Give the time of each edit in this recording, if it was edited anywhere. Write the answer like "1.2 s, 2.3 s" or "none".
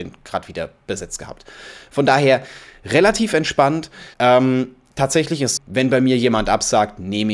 4.1 s, 5.6 s